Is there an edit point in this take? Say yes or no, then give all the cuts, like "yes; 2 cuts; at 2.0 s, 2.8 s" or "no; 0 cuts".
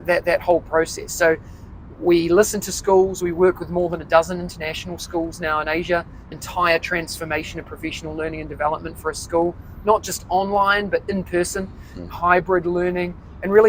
yes; 1 cut; at 6.3 s